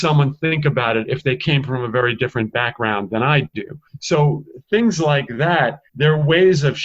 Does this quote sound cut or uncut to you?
cut